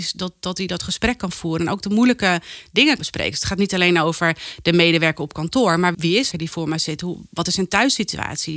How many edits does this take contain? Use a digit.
3